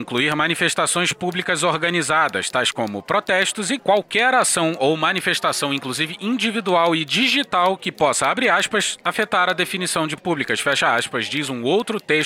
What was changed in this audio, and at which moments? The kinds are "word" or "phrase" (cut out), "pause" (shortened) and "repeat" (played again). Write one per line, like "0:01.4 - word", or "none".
0:03.8 - phrase
0:10.2 - word